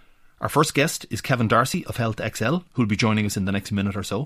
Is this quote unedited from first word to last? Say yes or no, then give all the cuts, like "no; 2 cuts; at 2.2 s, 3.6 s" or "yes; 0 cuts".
yes; 0 cuts